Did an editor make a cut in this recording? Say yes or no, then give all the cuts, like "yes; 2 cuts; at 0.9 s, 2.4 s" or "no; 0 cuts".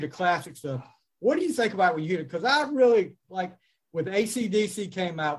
no; 0 cuts